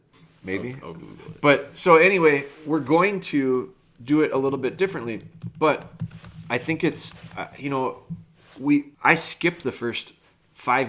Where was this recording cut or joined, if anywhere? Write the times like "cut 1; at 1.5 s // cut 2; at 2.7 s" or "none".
cut 1; at 8.9 s